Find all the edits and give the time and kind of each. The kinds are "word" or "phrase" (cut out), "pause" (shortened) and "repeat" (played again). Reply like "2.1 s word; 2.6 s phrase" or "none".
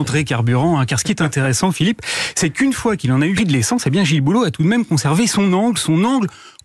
3.4 s phrase